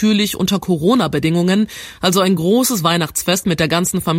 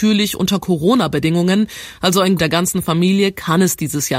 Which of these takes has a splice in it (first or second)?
second